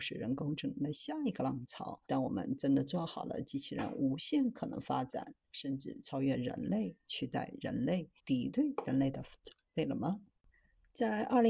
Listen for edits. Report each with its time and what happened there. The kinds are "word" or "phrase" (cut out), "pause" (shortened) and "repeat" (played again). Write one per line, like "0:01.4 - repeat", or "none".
0:02.0 - pause
0:08.2 - pause